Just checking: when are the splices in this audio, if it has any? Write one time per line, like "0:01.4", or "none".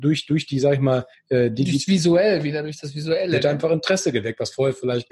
0:01.1